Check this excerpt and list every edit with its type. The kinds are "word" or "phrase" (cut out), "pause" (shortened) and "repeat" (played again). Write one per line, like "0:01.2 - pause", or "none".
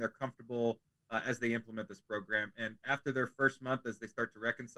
none